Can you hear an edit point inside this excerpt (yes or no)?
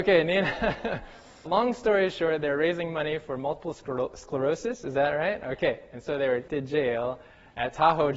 yes